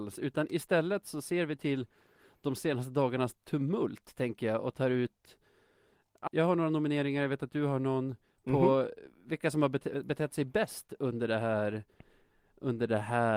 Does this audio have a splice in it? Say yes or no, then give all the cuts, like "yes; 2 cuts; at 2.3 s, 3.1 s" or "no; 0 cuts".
yes; 1 cut; at 6.3 s